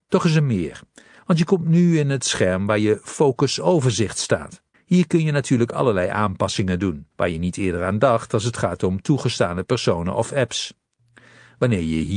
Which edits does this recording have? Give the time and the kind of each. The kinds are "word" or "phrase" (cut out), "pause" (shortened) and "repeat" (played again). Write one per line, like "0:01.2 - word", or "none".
0:04.7 - pause
0:07.1 - pause